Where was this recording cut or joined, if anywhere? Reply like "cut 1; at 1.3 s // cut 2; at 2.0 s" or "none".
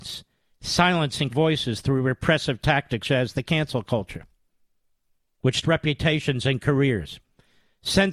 cut 1; at 1.3 s // cut 2; at 3.0 s // cut 3; at 5.6 s